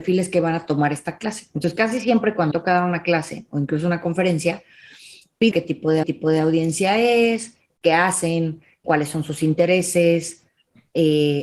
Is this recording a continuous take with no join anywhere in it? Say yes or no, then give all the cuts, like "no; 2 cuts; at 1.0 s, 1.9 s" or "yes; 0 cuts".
no; 5 cuts; at 2.5 s, 5.5 s, 6.0 s, 7.7 s, 8.8 s